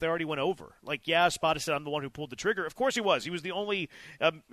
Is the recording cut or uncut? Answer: uncut